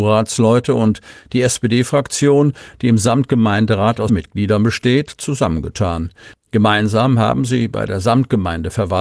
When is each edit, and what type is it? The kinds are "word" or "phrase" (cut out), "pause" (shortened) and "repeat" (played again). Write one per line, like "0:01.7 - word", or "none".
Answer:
0:04.1 - word